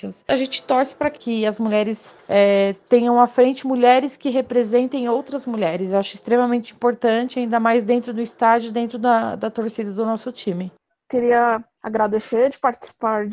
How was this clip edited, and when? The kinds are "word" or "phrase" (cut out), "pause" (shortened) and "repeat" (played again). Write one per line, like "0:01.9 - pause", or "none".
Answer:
0:11.7 - pause